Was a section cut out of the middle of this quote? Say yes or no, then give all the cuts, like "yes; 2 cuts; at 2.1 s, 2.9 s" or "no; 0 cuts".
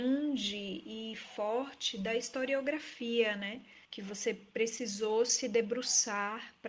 yes; 1 cut; at 3.8 s